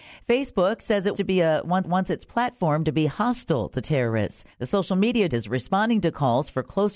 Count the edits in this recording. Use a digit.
4